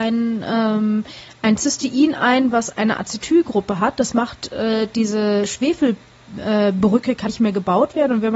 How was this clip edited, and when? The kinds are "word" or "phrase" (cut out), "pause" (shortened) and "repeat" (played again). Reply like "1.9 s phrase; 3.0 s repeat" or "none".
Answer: 7.3 s word